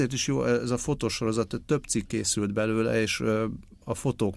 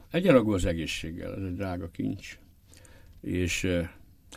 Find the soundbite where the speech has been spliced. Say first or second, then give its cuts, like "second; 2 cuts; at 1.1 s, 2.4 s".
first; 1 cut; at 2.1 s